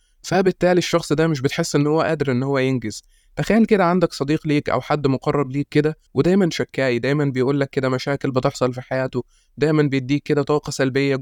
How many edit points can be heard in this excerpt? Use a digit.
1